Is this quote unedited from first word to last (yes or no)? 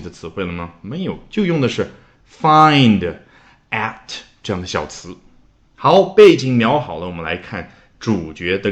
yes